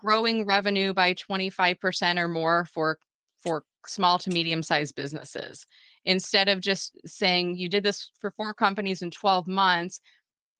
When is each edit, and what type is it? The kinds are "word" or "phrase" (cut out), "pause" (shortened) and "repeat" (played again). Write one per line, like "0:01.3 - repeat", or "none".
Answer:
none